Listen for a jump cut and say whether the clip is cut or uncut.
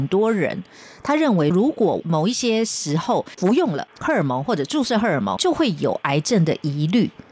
cut